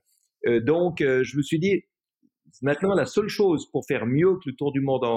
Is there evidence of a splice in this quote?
no; 0 cuts

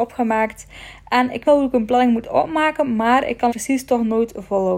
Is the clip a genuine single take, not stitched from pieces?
no; 2 cuts; at 1.4 s, 3.5 s

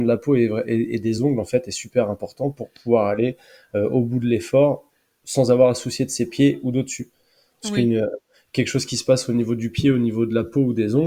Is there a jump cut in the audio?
no; 0 cuts

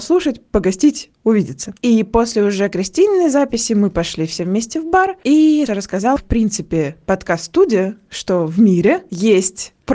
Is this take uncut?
no; 2 cuts; at 5.7 s, 6.2 s

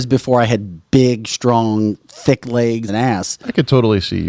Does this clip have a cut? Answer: yes; 1 cut; at 2.9 s

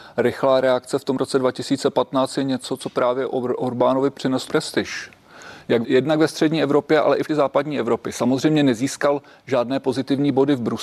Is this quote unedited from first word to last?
no; 3 cuts; at 4.5 s, 5.8 s, 7.3 s

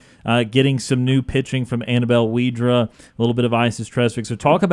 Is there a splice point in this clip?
no; 0 cuts

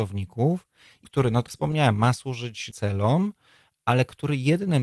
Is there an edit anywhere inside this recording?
yes; 3 cuts; at 1.0 s, 1.5 s, 2.7 s

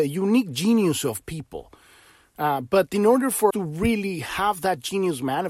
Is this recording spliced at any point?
yes; 1 cut; at 3.5 s

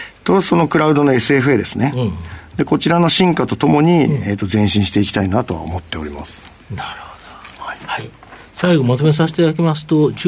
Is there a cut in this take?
no; 0 cuts

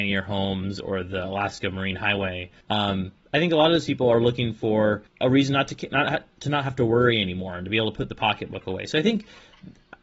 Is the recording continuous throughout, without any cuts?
no; 2 cuts; at 2.6 s, 5.1 s

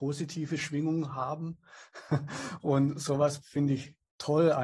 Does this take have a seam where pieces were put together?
yes; 1 cut; at 3.4 s

